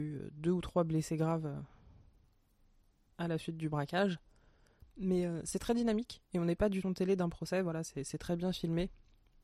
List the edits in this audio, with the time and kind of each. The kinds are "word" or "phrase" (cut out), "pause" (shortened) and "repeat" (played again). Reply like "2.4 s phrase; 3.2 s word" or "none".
6.8 s phrase